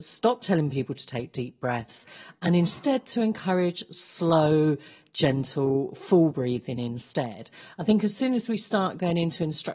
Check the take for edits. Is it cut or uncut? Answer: uncut